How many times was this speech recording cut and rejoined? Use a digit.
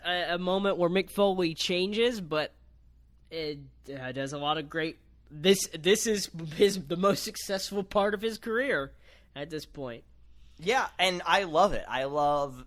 0